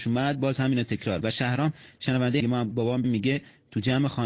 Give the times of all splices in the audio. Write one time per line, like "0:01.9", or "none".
0:01.2
0:02.4
0:02.7
0:03.0